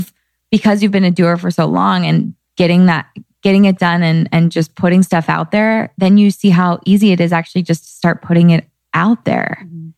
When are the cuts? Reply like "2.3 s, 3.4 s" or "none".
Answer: none